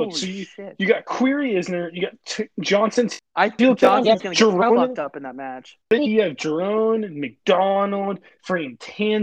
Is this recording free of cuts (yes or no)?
no